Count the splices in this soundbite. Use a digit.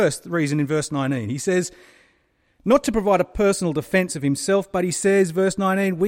0